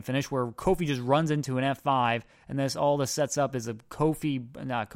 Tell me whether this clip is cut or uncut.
uncut